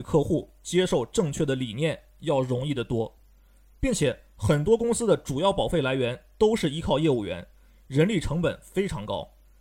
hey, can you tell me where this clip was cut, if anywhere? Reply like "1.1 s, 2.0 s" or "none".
none